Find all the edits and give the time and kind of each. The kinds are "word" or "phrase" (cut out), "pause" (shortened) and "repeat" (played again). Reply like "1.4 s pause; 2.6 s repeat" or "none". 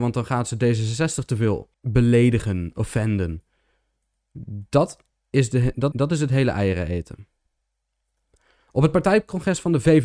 5.9 s repeat